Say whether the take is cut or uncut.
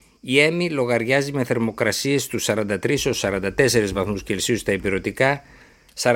uncut